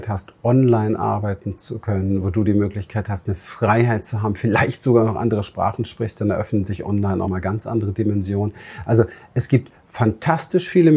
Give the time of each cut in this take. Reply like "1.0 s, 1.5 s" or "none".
7.2 s